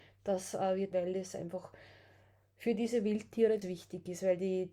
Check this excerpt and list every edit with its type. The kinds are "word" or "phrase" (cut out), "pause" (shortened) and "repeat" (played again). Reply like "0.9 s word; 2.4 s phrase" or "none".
0.9 s phrase; 3.6 s word